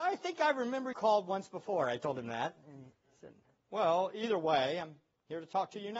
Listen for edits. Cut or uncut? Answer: cut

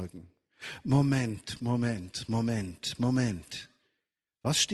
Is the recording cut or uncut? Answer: uncut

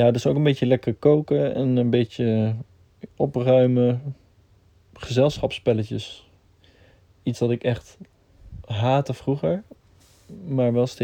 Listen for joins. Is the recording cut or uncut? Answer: cut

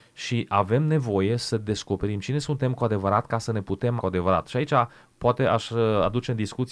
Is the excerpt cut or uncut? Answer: cut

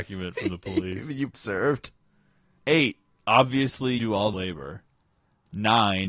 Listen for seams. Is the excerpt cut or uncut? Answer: cut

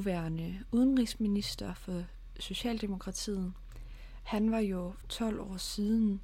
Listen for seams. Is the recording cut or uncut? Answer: cut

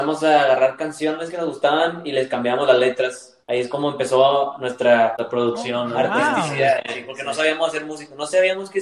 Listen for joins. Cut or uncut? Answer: cut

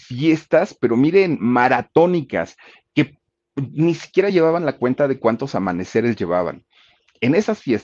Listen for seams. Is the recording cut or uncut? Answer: uncut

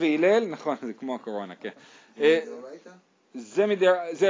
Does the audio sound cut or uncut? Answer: uncut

